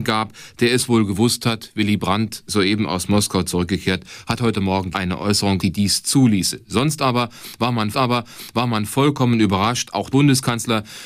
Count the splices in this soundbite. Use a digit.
4